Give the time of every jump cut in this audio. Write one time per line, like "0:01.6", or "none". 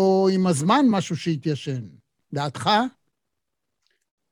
none